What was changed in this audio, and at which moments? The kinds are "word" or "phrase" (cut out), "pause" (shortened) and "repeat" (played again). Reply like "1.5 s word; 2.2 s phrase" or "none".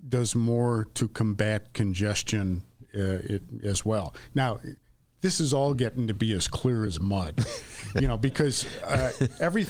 none